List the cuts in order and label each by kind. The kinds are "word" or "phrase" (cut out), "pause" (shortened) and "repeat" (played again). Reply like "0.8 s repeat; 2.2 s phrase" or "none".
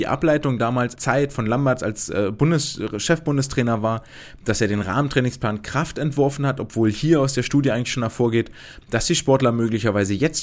1.0 s phrase